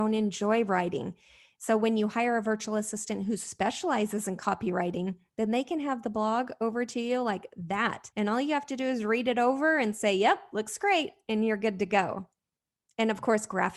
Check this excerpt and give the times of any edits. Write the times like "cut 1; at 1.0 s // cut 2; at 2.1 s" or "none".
cut 1; at 8.1 s